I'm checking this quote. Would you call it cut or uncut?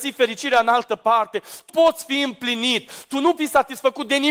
cut